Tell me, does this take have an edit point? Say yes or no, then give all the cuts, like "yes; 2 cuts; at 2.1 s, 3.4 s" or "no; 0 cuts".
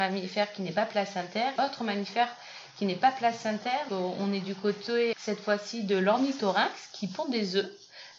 yes; 3 cuts; at 1.6 s, 3.9 s, 5.1 s